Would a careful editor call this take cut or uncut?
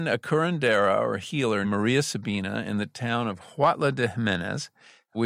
cut